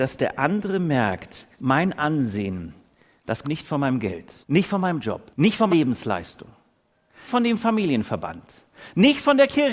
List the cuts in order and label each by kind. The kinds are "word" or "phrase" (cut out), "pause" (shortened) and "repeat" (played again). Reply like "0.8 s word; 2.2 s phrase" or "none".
1.5 s pause; 3.4 s word; 4.4 s pause; 5.3 s pause; 5.7 s word; 7.3 s word